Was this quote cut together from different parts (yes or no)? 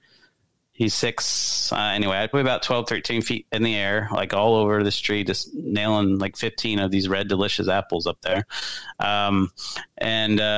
yes